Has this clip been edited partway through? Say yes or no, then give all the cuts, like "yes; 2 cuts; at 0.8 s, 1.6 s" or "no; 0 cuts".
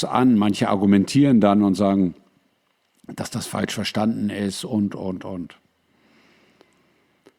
no; 0 cuts